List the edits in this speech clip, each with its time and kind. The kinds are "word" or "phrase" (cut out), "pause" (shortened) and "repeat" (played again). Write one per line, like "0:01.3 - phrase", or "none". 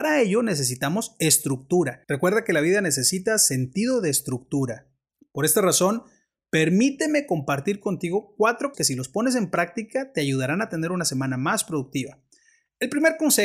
0:02.0 - pause
0:08.7 - word